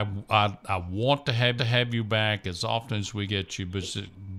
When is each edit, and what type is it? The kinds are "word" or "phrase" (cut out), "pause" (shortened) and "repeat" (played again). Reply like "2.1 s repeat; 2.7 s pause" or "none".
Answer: 1.6 s repeat; 3.3 s word